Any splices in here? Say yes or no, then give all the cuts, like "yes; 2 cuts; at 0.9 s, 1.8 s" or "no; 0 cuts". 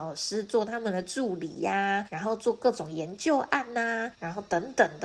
yes; 2 cuts; at 2.1 s, 4.1 s